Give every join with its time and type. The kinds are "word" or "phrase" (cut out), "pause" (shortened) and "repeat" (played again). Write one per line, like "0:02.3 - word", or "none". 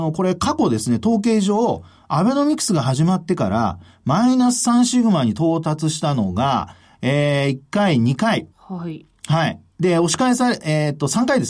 0:08.5 - pause